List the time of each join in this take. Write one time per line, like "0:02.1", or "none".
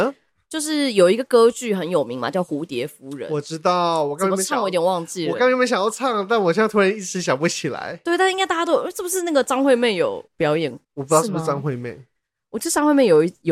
0:10.3
0:10.8